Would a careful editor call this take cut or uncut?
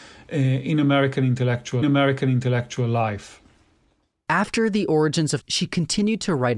cut